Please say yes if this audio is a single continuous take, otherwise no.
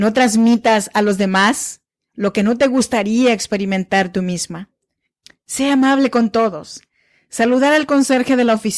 yes